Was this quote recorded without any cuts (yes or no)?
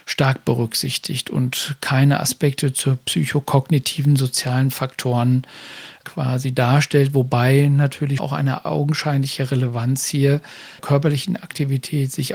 no